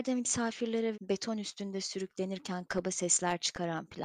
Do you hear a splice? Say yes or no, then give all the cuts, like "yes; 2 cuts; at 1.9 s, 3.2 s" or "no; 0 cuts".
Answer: yes; 1 cut; at 0.9 s